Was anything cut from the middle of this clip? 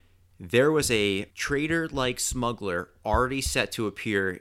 yes; 1 cut; at 1.3 s

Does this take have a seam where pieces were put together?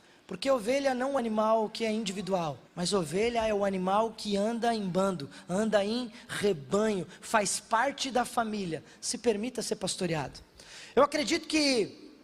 yes; 2 cuts; at 1.2 s, 2.7 s

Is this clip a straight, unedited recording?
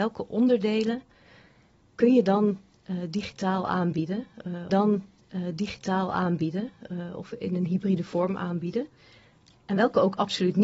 no; 1 cut; at 4.7 s

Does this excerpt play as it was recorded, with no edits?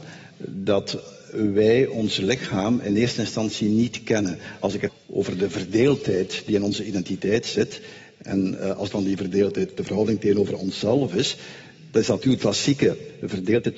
no; 3 cuts; at 4.9 s, 8.9 s, 12.4 s

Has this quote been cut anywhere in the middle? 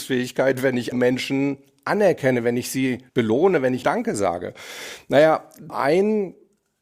yes; 4 cuts; at 0.9 s, 3.1 s, 3.8 s, 5.7 s

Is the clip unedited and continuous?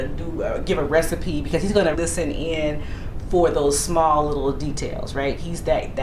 no; 1 cut; at 1.9 s

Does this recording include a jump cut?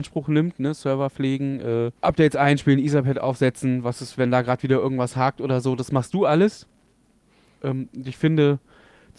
yes; 1 cut; at 2.0 s

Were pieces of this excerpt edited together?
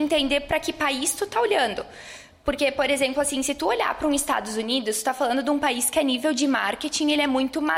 no; 0 cuts

